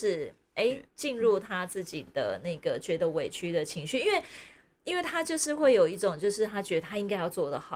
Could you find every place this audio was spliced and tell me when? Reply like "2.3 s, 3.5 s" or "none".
none